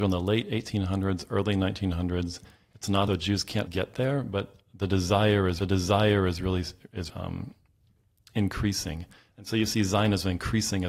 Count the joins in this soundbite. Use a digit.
4